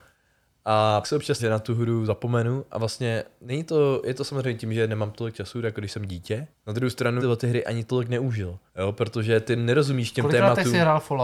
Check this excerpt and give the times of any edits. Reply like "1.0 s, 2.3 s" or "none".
1.0 s, 1.4 s, 6.5 s, 7.2 s, 8.7 s